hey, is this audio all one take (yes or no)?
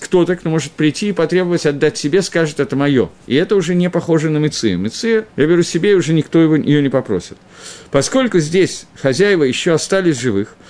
no